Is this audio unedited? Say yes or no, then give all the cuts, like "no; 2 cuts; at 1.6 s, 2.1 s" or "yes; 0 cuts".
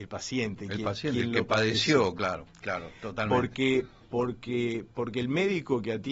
yes; 0 cuts